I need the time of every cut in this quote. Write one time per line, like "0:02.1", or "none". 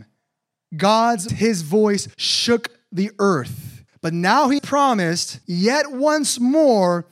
0:01.3
0:02.1
0:03.9
0:04.6
0:05.4